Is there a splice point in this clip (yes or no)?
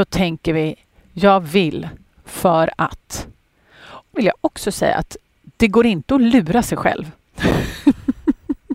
yes